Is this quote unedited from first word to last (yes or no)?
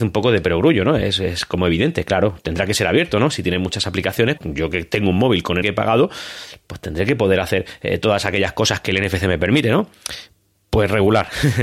no